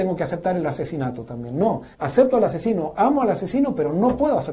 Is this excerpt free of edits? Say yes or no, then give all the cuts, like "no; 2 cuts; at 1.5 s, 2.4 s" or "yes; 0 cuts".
no; 1 cut; at 1.9 s